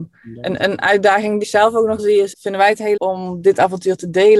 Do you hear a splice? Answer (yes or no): yes